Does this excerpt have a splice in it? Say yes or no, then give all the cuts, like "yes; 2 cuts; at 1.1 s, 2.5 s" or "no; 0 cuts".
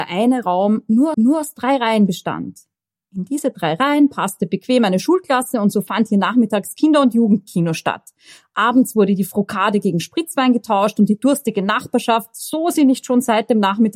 yes; 1 cut; at 1.1 s